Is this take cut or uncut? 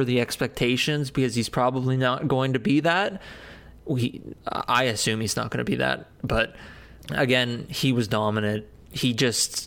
uncut